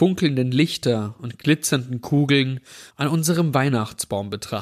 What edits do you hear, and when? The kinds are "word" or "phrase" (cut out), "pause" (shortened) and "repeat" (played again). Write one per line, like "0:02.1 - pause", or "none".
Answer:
none